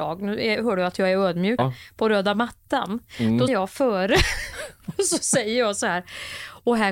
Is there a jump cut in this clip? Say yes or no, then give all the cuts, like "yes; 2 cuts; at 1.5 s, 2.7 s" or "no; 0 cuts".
yes; 2 cuts; at 1.6 s, 3.5 s